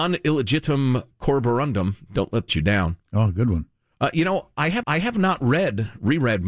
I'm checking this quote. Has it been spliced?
yes; 2 cuts; at 2.5 s, 4.8 s

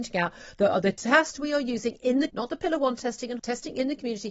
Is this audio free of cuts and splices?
no; 2 cuts; at 2.3 s, 3.4 s

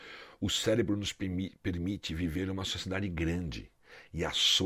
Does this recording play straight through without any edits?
yes; 0 cuts

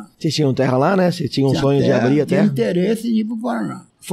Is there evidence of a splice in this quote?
no; 0 cuts

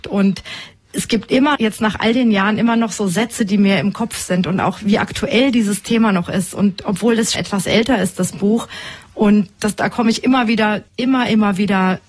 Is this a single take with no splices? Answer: no; 3 cuts; at 1.6 s, 7.3 s, 10.9 s

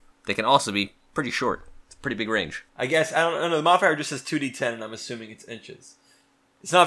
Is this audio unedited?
no; 2 cuts; at 1.8 s, 2.7 s

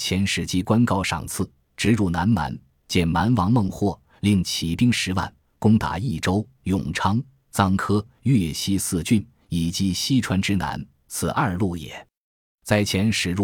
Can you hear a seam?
no; 0 cuts

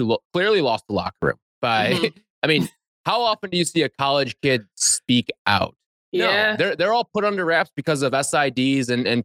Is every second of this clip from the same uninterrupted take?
yes; 0 cuts

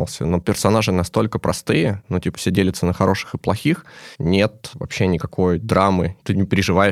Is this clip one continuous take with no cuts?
yes; 0 cuts

